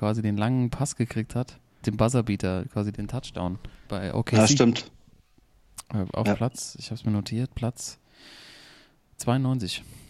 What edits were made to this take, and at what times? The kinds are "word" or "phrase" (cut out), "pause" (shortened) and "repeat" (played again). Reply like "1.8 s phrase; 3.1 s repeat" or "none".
1.8 s word; 2.9 s word; 3.8 s word